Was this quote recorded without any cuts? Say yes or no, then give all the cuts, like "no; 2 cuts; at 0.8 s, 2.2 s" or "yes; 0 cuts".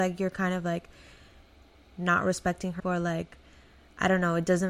no; 1 cut; at 2.8 s